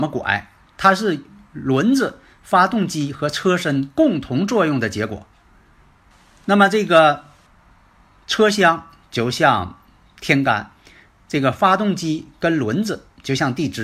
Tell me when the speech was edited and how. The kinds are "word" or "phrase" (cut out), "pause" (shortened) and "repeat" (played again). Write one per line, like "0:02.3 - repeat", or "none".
none